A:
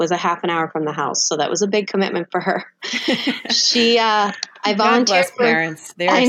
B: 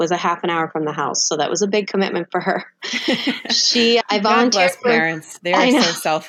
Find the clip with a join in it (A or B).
B